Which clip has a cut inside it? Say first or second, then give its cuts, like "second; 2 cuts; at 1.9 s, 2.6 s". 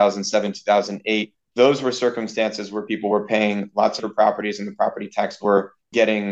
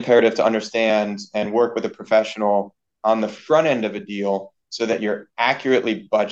first; 3 cuts; at 1.4 s, 4.0 s, 5.4 s